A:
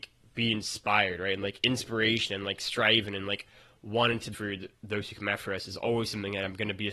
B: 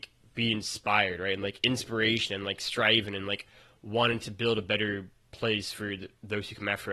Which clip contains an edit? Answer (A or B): A